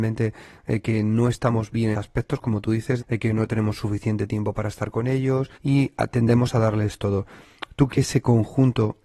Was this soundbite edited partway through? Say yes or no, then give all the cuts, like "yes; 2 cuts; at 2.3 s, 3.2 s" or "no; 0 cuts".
yes; 4 cuts; at 1.9 s, 3.0 s, 5.5 s, 7.9 s